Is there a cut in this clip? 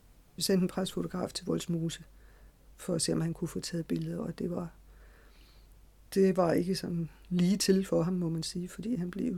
no; 0 cuts

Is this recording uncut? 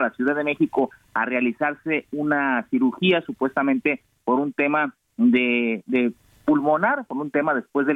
yes; 0 cuts

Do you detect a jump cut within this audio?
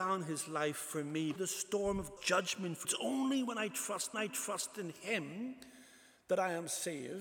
yes; 4 cuts; at 1.4 s, 2.2 s, 2.8 s, 4.1 s

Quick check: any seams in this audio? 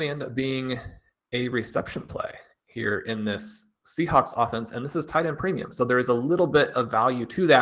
no; 0 cuts

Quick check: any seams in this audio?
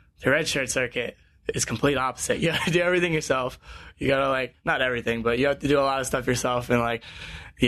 no; 0 cuts

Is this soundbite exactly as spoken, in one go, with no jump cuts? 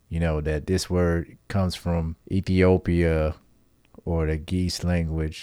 no; 1 cut; at 2.2 s

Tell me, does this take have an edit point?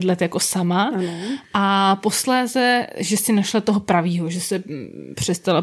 no; 0 cuts

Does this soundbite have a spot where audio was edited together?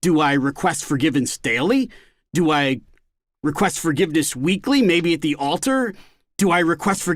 no; 0 cuts

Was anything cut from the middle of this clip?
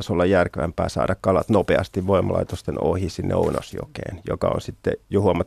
no; 0 cuts

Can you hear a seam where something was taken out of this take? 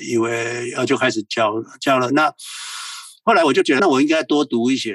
yes; 1 cut; at 3.8 s

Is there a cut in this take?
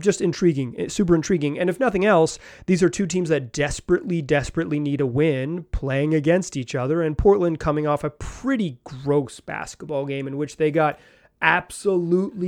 no; 0 cuts

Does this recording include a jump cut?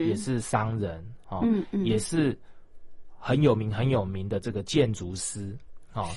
no; 0 cuts

